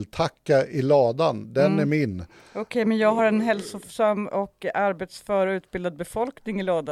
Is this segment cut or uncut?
uncut